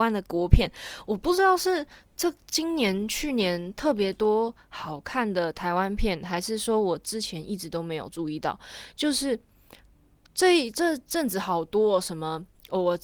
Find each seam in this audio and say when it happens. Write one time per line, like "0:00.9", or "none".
none